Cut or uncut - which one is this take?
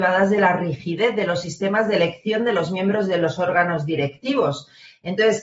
uncut